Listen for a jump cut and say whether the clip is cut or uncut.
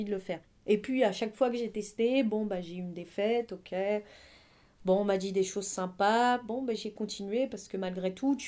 uncut